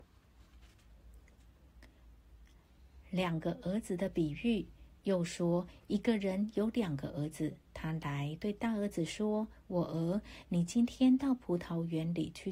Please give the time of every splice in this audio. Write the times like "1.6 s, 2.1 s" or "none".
7.6 s